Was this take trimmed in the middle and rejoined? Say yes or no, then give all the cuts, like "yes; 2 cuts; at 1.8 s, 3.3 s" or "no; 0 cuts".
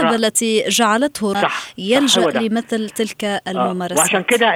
yes; 1 cut; at 1.3 s